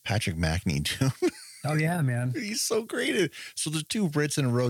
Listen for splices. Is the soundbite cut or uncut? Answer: uncut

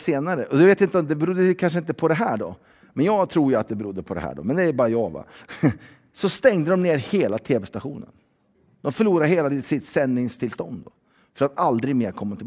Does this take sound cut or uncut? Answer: uncut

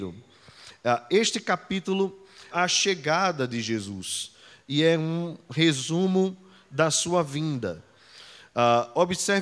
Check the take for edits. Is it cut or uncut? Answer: cut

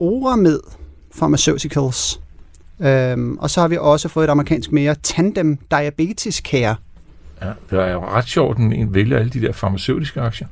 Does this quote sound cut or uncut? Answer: uncut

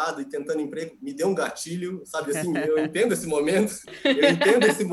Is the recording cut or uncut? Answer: uncut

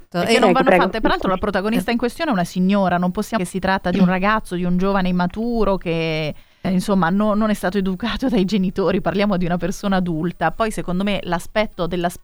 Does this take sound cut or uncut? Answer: cut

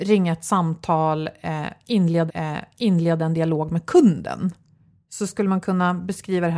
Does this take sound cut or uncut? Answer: cut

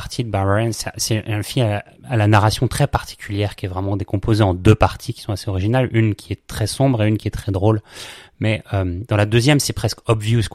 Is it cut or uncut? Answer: uncut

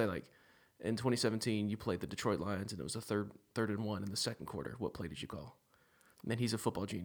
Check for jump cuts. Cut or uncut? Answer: uncut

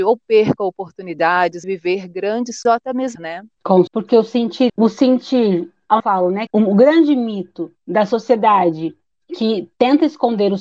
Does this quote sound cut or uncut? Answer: cut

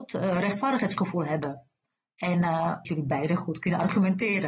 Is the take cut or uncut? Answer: cut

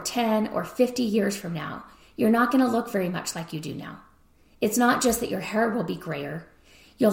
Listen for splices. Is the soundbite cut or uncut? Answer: uncut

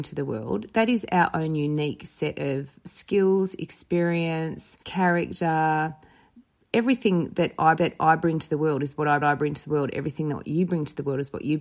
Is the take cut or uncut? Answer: cut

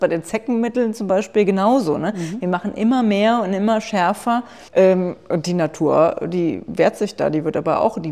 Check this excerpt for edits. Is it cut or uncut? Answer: cut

